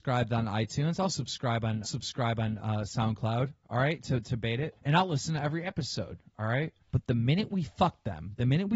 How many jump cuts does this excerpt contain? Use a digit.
3